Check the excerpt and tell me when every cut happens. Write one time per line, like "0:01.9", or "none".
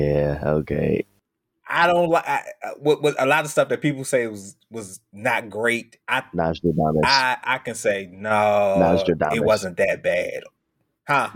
0:06.0